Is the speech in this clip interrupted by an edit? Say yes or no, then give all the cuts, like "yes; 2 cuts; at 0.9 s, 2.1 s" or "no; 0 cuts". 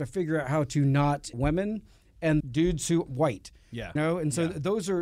yes; 4 cuts; at 1.3 s, 2.4 s, 3.1 s, 4.0 s